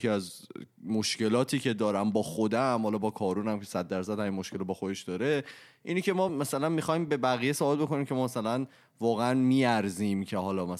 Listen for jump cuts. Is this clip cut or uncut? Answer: uncut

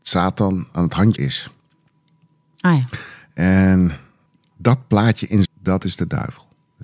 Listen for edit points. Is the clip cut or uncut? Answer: cut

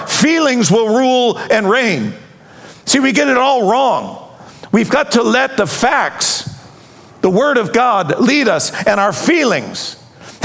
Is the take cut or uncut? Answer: uncut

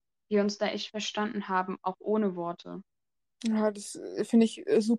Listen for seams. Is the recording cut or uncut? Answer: uncut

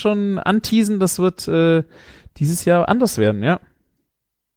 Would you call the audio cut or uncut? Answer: uncut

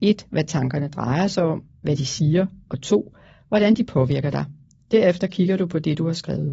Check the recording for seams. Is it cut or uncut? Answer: uncut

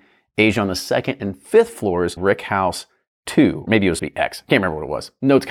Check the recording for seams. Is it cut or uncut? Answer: cut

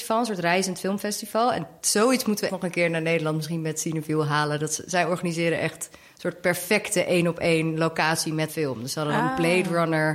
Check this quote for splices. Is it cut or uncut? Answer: cut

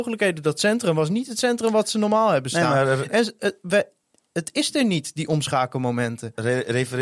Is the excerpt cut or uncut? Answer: uncut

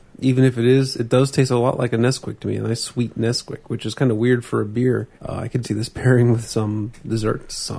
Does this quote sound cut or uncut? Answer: cut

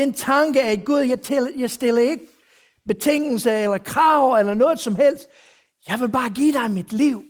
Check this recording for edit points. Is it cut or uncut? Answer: uncut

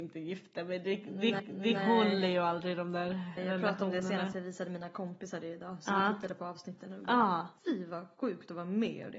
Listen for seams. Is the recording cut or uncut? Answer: cut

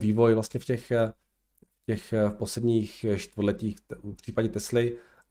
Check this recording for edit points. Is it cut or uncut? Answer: uncut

